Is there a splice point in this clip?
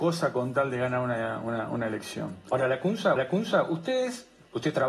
yes; 1 cut; at 3.2 s

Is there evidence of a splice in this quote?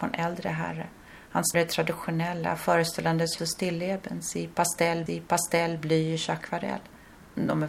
yes; 3 cuts; at 1.5 s, 3.4 s, 5.1 s

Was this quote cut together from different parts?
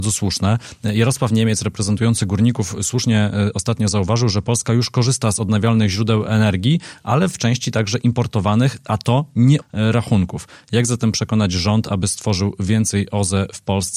yes; 1 cut; at 9.6 s

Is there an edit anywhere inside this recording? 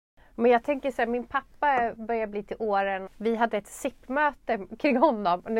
yes; 1 cut; at 3.1 s

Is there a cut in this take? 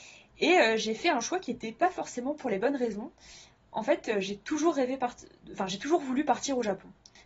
no; 0 cuts

